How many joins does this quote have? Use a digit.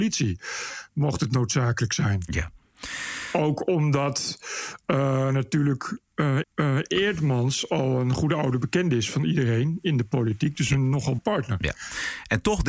2